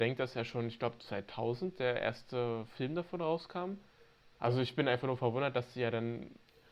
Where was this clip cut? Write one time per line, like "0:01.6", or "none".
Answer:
0:04.3